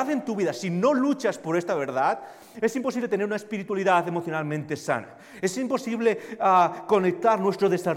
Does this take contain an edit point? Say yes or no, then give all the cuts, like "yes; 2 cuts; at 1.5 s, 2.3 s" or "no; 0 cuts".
no; 0 cuts